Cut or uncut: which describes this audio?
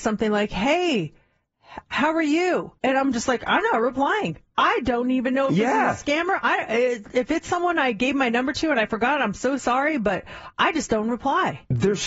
cut